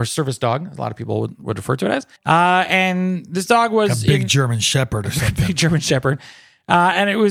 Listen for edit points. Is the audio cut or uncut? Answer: cut